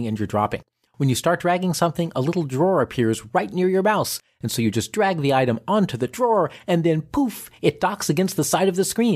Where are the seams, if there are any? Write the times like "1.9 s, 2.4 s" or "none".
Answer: none